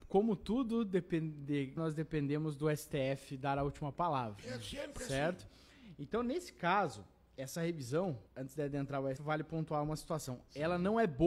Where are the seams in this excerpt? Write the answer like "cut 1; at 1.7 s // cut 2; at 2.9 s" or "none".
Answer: cut 1; at 1.8 s // cut 2; at 8.3 s // cut 3; at 9.2 s